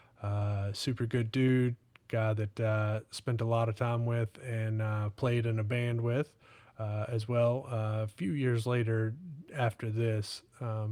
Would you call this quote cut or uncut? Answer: uncut